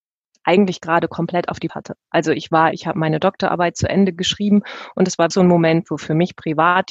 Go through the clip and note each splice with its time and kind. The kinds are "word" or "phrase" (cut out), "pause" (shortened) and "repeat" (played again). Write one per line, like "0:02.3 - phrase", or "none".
0:01.7 - phrase
0:02.7 - phrase
0:05.3 - word